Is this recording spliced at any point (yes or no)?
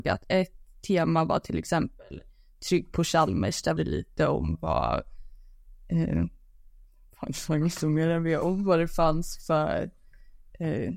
yes